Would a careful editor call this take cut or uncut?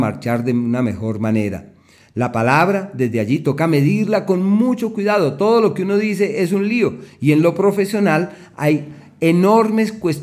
uncut